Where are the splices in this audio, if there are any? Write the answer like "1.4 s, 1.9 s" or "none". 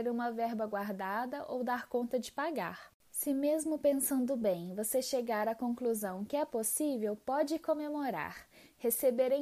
none